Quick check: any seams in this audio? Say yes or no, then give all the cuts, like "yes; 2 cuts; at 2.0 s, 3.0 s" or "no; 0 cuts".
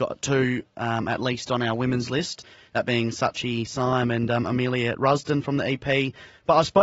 no; 0 cuts